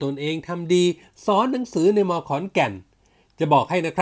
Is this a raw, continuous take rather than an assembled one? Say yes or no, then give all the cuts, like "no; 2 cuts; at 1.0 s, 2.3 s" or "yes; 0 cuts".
yes; 0 cuts